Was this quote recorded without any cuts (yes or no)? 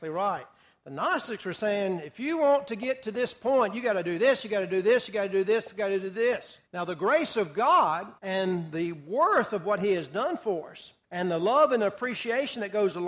no